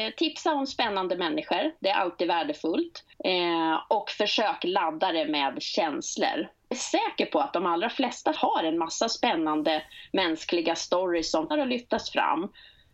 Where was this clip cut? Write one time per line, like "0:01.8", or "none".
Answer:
0:03.1
0:06.7
0:08.4
0:11.5